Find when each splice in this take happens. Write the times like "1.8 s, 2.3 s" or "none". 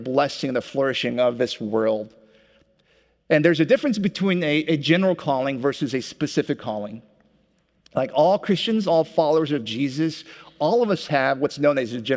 none

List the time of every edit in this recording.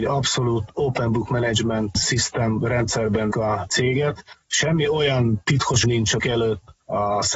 3.3 s, 5.8 s, 6.2 s

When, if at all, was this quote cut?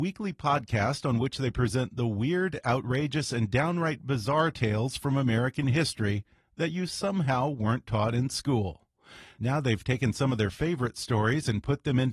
none

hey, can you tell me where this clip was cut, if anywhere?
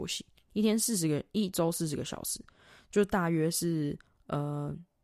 none

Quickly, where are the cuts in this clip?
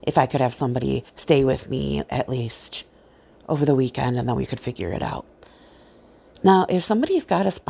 1.1 s

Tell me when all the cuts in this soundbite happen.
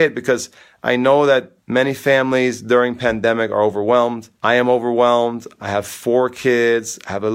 1.6 s, 4.3 s

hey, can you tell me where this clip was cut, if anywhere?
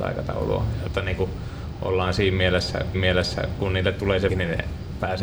2.9 s, 4.3 s

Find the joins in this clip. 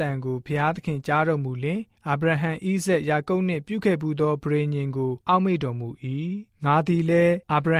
6.5 s

